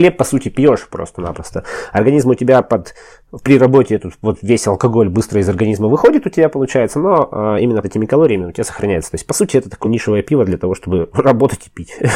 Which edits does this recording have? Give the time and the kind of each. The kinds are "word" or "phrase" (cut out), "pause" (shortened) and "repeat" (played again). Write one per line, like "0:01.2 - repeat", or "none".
0:07.8 - phrase
0:09.8 - word